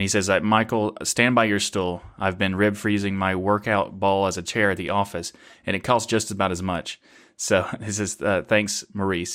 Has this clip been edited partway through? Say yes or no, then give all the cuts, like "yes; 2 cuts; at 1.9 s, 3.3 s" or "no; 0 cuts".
no; 0 cuts